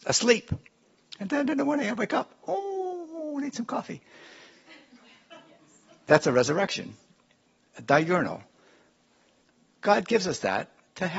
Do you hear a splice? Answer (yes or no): no